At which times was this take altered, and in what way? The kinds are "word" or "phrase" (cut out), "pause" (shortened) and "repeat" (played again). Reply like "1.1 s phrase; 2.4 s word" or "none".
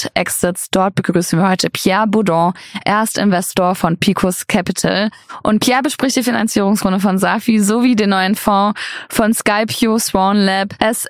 none